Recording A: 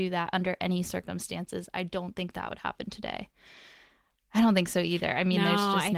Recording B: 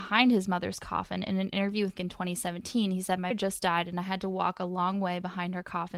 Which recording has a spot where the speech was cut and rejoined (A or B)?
B